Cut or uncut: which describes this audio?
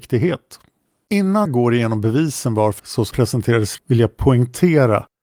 cut